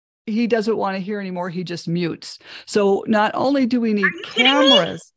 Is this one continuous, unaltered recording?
yes; 0 cuts

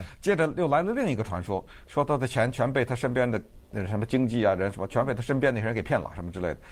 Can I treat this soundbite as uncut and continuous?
no; 1 cut; at 3.6 s

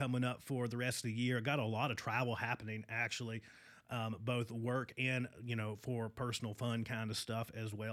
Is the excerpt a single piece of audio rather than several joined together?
yes; 0 cuts

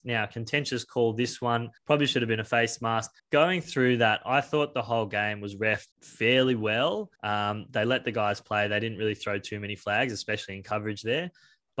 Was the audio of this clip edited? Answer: yes; 4 cuts; at 1.8 s, 3.2 s, 5.9 s, 7.2 s

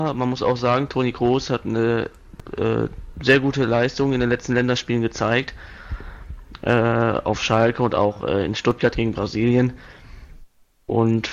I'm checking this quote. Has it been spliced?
no; 0 cuts

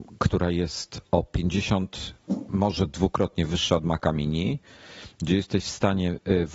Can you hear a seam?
no; 0 cuts

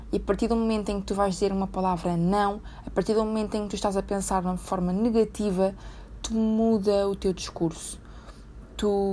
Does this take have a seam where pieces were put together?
no; 0 cuts

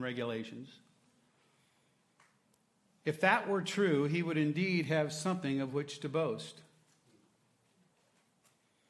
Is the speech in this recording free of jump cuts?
yes; 0 cuts

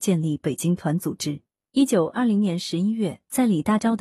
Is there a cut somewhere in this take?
no; 0 cuts

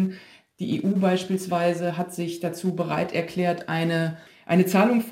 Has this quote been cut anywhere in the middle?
no; 0 cuts

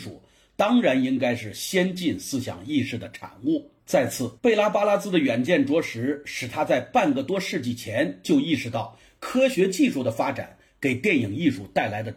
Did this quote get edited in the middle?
yes; 2 cuts; at 3.8 s, 4.4 s

